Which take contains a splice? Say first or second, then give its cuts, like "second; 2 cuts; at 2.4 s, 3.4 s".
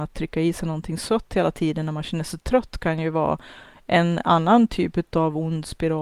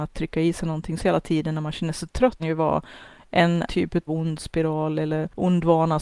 second; 4 cuts; at 1.0 s, 2.4 s, 3.7 s, 4.1 s